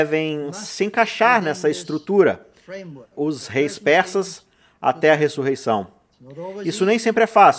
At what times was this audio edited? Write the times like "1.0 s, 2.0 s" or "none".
3.1 s